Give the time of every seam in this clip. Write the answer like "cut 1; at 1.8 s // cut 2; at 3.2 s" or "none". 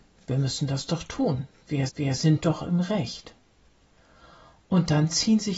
cut 1; at 1.9 s